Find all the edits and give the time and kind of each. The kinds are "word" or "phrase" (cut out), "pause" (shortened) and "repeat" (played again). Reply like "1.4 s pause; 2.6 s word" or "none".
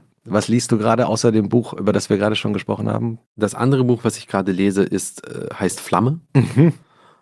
3.3 s pause